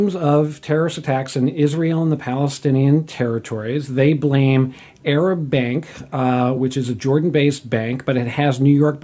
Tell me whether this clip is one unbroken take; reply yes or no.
yes